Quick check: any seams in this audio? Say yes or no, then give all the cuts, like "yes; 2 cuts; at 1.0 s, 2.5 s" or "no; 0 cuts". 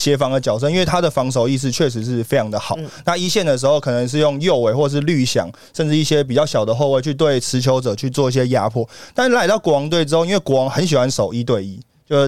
no; 0 cuts